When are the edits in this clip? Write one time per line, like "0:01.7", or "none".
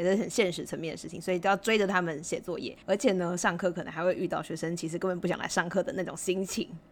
0:02.8